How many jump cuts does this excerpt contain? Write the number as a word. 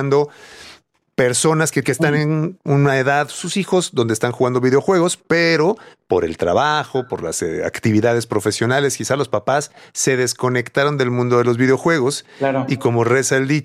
one